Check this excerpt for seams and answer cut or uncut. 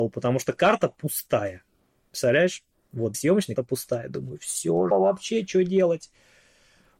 cut